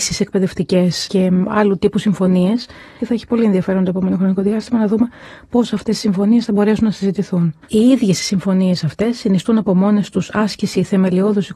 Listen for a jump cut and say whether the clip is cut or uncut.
cut